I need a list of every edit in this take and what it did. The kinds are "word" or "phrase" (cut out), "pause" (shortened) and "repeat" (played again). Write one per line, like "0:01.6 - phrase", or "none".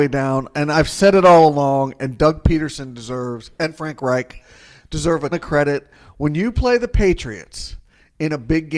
0:05.3 - word